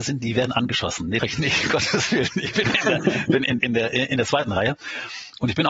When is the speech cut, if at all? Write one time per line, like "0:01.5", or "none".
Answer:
0:01.2
0:03.6